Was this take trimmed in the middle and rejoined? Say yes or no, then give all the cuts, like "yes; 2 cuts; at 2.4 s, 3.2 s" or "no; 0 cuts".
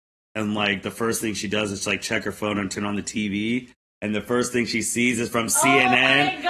no; 0 cuts